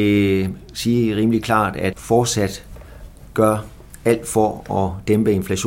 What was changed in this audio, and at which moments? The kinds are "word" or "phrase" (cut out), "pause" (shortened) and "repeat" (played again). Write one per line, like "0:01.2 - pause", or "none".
0:01.9 - word